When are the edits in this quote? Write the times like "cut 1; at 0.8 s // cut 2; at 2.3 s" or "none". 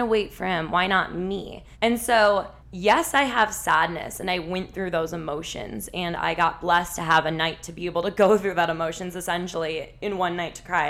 cut 1; at 1.7 s // cut 2; at 2.6 s